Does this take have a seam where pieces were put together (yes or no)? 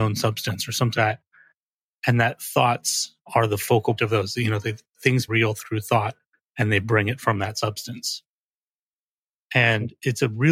yes